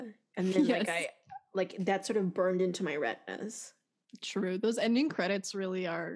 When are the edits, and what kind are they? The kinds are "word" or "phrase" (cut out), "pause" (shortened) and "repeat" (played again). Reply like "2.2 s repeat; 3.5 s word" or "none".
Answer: none